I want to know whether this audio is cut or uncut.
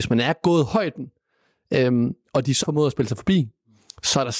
cut